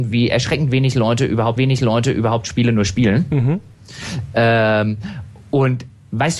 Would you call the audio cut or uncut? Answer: cut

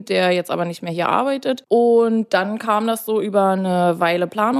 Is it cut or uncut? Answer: uncut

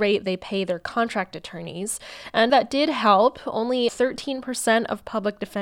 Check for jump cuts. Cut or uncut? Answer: cut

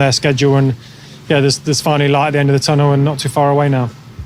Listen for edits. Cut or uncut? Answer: uncut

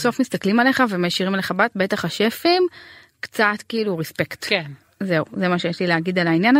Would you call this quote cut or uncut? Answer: uncut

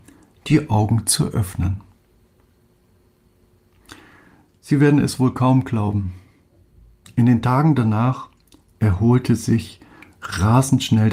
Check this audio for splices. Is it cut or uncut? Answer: uncut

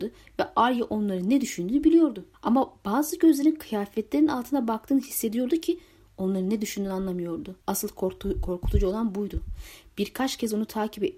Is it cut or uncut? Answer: cut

